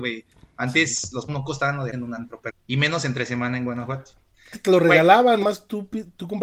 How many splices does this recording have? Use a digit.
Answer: 5